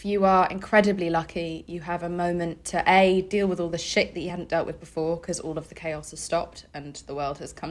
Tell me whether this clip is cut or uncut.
uncut